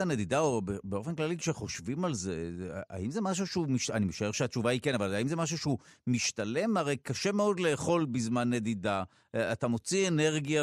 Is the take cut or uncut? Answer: uncut